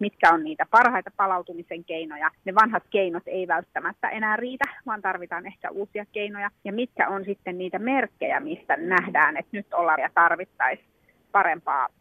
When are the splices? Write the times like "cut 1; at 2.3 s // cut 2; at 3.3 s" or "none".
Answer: cut 1; at 2.4 s // cut 2; at 6.6 s // cut 3; at 10.0 s